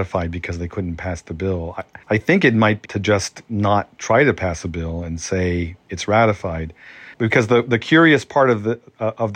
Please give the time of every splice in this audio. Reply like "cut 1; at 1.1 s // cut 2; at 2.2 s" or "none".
cut 1; at 2.0 s // cut 2; at 2.9 s // cut 3; at 7.1 s